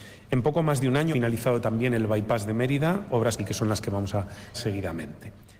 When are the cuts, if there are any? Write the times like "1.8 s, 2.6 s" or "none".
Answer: 1.1 s, 3.4 s, 4.5 s